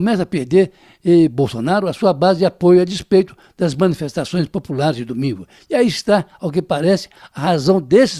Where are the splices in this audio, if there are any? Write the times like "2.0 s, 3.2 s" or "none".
none